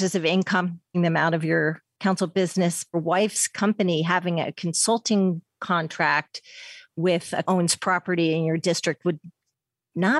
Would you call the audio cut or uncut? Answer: cut